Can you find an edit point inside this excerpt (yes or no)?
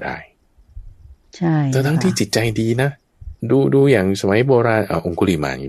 yes